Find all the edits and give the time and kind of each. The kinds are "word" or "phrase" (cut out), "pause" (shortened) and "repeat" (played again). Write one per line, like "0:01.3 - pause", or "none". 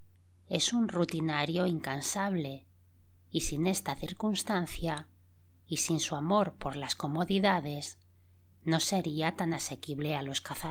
none